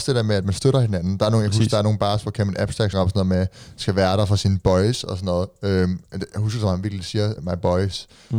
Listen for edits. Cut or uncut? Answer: cut